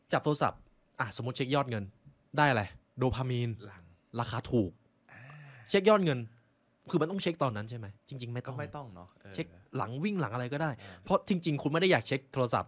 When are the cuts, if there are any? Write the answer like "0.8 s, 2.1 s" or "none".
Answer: 2.8 s, 8.0 s